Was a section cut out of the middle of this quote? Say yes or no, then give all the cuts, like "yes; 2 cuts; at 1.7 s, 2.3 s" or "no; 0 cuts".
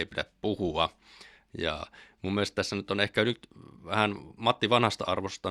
no; 0 cuts